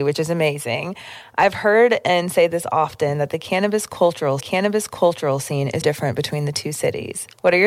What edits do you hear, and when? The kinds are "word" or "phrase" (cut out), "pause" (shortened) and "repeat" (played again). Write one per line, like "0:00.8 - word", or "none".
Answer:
0:04.4 - repeat
0:05.8 - word